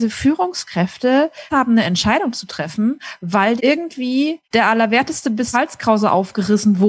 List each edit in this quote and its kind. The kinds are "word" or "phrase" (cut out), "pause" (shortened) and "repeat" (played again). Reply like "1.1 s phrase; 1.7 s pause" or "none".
1.5 s word; 3.6 s word; 4.4 s pause; 5.5 s word